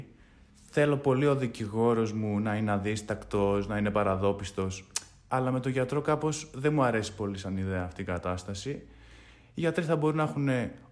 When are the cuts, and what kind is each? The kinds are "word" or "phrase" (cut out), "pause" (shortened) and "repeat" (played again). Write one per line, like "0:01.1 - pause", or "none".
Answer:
none